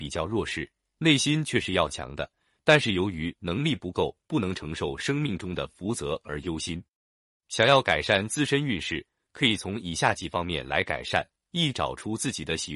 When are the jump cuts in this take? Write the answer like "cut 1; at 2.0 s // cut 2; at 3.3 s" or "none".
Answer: none